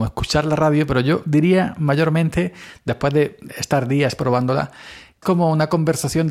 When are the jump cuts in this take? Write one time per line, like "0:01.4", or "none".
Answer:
0:05.2